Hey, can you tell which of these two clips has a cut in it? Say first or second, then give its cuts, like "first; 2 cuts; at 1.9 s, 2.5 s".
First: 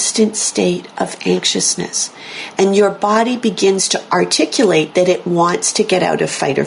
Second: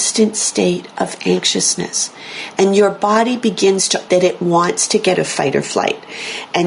second; 2 cuts; at 4.1 s, 5.1 s